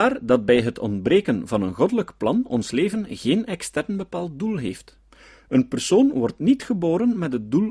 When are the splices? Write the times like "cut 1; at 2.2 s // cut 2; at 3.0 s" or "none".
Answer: none